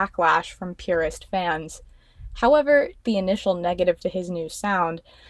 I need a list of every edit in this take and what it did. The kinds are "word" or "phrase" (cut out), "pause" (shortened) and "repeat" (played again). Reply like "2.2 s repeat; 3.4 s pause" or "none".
3.0 s word; 4.0 s word